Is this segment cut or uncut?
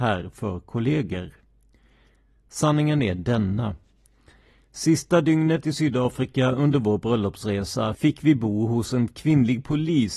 uncut